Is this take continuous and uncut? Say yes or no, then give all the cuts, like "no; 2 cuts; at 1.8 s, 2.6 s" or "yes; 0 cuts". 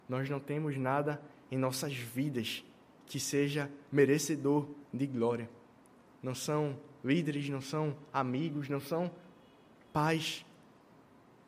yes; 0 cuts